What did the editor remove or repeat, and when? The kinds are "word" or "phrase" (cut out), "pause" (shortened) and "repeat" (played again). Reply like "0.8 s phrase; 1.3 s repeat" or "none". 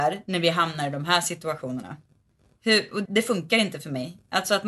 3.1 s word